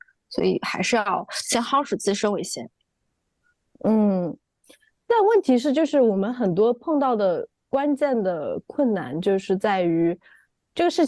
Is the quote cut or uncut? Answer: uncut